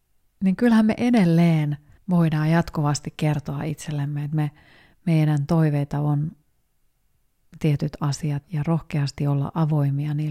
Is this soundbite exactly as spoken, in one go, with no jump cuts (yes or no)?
no